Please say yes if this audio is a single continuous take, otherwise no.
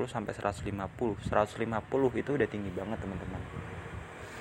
yes